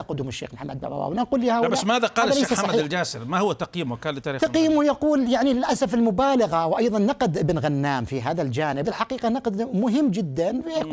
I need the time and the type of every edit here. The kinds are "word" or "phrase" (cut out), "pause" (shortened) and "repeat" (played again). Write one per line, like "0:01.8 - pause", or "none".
0:08.8 - word